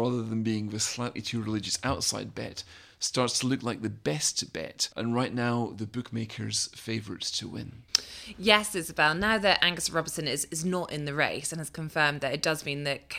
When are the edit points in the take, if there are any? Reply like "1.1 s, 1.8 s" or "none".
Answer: 4.9 s